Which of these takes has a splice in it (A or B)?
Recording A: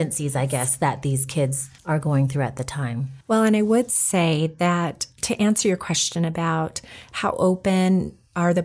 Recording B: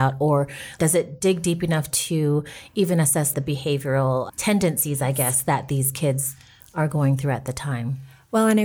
A